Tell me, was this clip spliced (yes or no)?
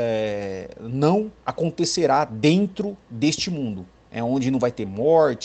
yes